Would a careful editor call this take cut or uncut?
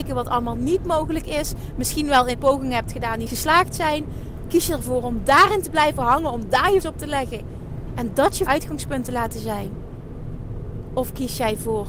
cut